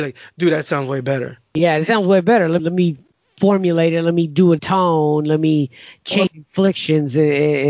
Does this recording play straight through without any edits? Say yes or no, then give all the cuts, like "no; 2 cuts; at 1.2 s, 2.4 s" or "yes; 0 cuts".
no; 3 cuts; at 2.6 s, 4.6 s, 6.3 s